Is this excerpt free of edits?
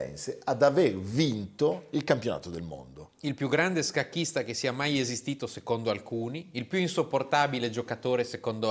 yes; 0 cuts

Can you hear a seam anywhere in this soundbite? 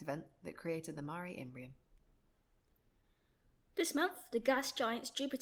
no; 0 cuts

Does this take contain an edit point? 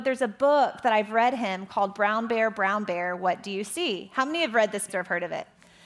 yes; 1 cut; at 4.9 s

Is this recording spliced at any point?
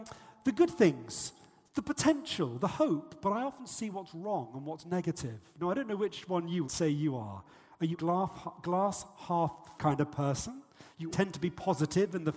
yes; 4 cuts; at 6.6 s, 7.9 s, 9.8 s, 11.1 s

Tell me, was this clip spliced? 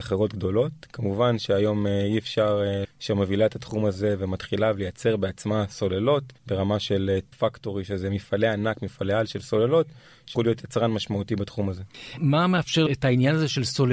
yes; 5 cuts; at 2.8 s, 6.4 s, 7.3 s, 10.4 s, 12.9 s

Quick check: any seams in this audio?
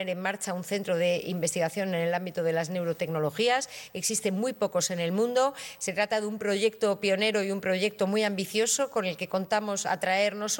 no; 0 cuts

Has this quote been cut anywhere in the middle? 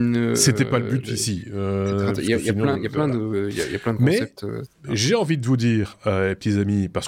no; 0 cuts

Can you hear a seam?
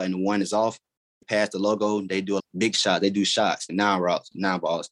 yes; 3 cuts; at 1.2 s, 2.4 s, 3.7 s

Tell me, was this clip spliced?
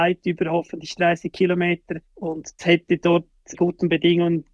yes; 2 cuts; at 2.6 s, 3.5 s

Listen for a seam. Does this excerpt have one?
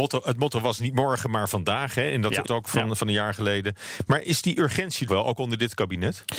yes; 2 cuts; at 2.5 s, 5.1 s

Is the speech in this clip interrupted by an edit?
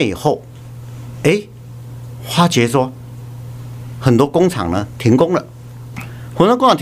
no; 0 cuts

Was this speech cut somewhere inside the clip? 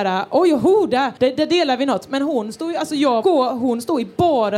yes; 2 cuts; at 1.2 s, 3.2 s

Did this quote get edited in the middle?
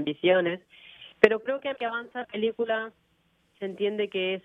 yes; 3 cuts; at 1.1 s, 1.8 s, 2.2 s

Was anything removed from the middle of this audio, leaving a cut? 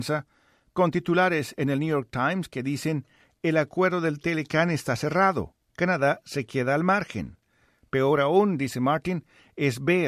no; 0 cuts

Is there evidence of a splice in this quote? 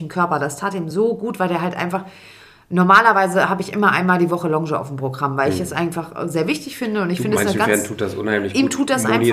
no; 0 cuts

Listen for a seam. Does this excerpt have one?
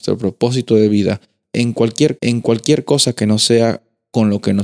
yes; 1 cut; at 2.2 s

